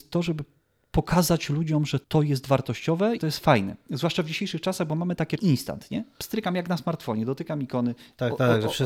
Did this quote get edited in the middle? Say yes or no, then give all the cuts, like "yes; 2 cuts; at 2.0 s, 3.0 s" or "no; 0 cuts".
yes; 3 cuts; at 2.0 s, 3.2 s, 5.4 s